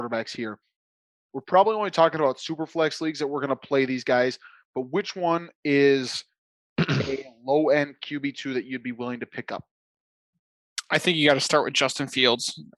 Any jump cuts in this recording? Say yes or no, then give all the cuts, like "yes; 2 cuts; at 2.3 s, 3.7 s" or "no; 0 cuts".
no; 0 cuts